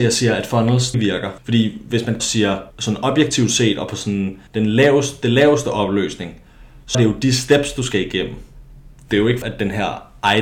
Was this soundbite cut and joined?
yes; 7 cuts; at 0.9 s, 1.4 s, 2.2 s, 2.7 s, 4.5 s, 6.9 s, 9.4 s

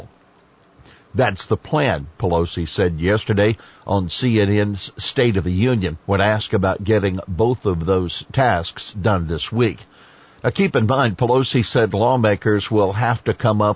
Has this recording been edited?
yes; 1 cut; at 6.0 s

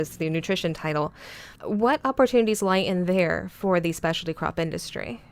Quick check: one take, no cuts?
no; 1 cut; at 1.6 s

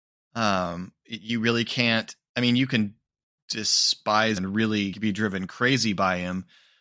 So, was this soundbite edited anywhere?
yes; 2 cuts; at 4.4 s, 4.9 s

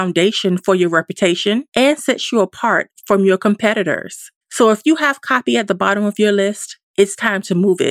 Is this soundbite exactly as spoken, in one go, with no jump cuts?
no; 3 cuts; at 1.7 s, 4.4 s, 6.9 s

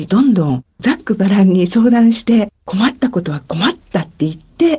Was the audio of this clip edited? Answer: yes; 1 cut; at 2.6 s

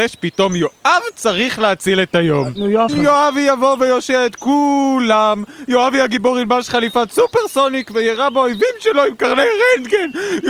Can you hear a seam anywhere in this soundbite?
yes; 1 cut; at 2.9 s

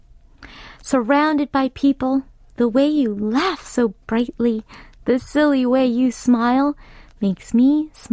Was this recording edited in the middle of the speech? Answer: no; 0 cuts

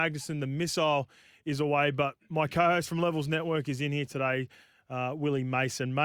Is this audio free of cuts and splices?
yes; 0 cuts

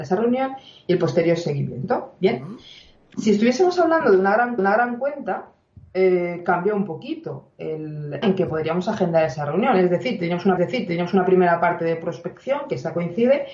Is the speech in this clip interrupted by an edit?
yes; 3 cuts; at 4.6 s, 8.2 s, 10.6 s

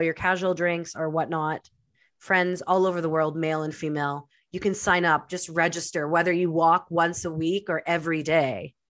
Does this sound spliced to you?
no; 0 cuts

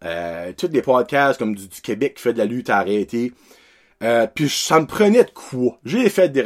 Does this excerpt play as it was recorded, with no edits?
yes; 0 cuts

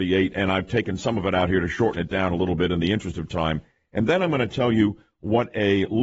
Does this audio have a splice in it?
no; 0 cuts

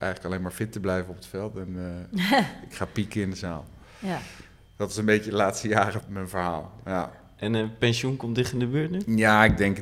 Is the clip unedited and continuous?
no; 1 cut; at 6.0 s

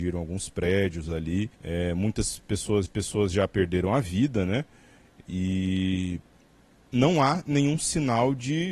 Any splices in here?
yes; 2 cuts; at 1.5 s, 2.9 s

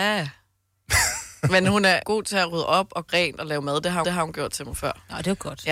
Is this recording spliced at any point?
yes; 3 cuts; at 2.0 s, 3.1 s, 4.0 s

